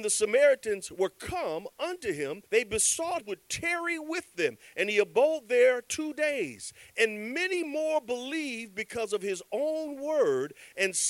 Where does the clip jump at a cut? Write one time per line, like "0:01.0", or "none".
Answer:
0:02.4
0:03.2